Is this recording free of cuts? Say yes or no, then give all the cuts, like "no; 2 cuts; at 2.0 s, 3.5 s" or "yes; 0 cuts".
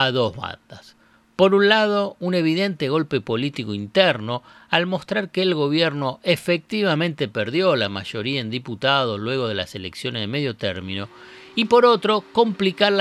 yes; 0 cuts